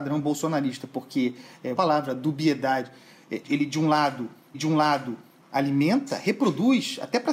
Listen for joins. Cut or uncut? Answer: cut